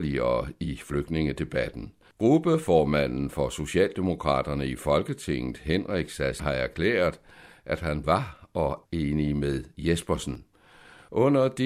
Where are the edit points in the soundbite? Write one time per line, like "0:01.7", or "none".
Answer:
0:06.4
0:08.0
0:08.8